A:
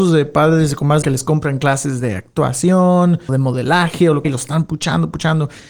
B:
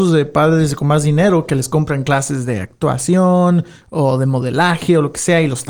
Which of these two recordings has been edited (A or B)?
A